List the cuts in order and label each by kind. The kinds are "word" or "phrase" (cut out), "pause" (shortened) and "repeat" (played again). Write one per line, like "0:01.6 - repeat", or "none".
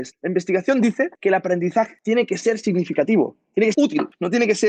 0:03.7 - word